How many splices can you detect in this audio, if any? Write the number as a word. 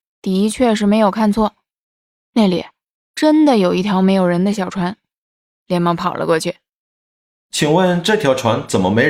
zero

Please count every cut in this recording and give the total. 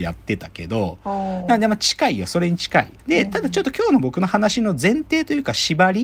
one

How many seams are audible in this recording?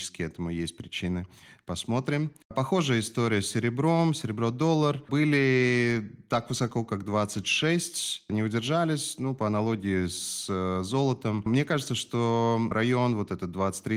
zero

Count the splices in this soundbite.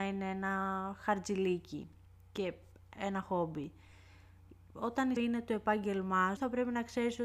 three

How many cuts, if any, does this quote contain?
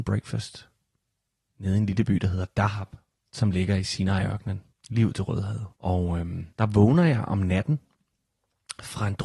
four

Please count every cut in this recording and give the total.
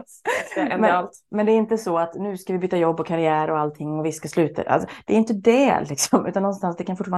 zero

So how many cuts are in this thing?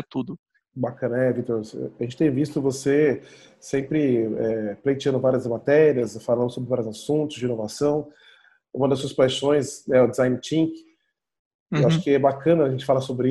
zero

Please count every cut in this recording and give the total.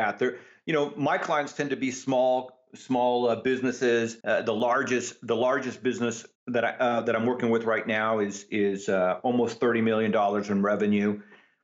two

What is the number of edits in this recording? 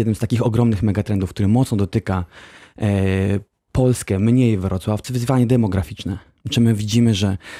one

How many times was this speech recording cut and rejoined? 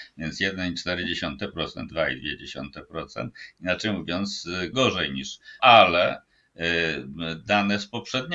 three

